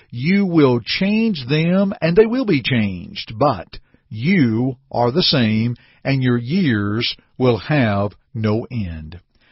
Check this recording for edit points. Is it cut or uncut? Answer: uncut